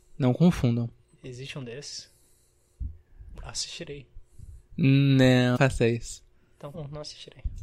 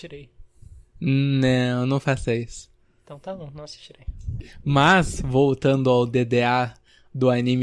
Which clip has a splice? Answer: first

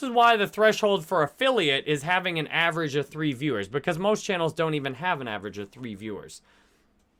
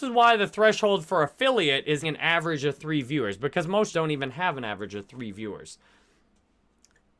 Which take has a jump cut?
second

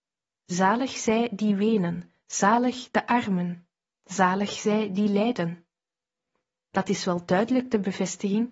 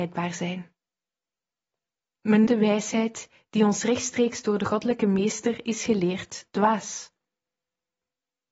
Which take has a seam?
second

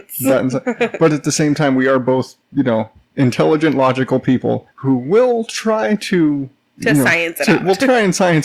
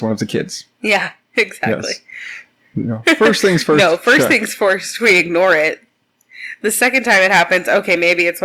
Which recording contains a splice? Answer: first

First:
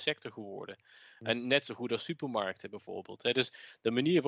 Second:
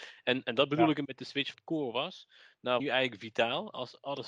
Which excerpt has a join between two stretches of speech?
second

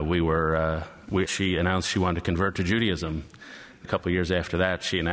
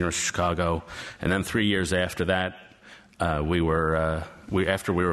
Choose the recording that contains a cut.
first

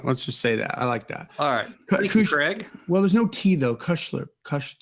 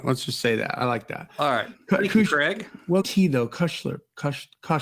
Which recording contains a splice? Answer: second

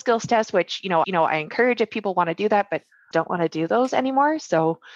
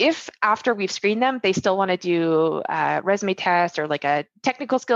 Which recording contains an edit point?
first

